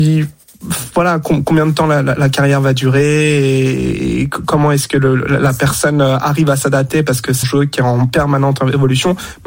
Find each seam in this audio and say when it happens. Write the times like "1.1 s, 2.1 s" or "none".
7.4 s